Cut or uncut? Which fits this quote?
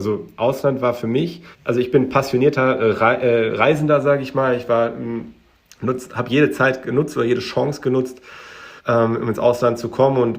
cut